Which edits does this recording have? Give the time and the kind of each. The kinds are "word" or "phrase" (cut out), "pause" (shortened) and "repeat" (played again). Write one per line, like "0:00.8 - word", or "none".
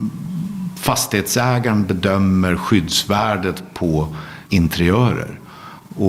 0:04.5 - pause